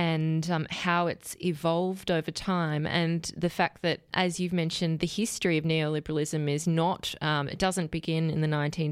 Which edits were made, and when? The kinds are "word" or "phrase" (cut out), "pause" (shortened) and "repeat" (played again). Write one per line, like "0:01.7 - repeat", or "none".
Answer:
none